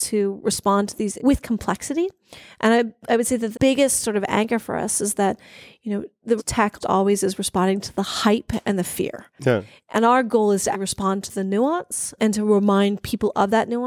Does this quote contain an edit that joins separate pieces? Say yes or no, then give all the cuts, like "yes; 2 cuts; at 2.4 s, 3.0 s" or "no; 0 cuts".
yes; 6 cuts; at 1.2 s, 3.5 s, 6.4 s, 6.8 s, 10.7 s, 12.2 s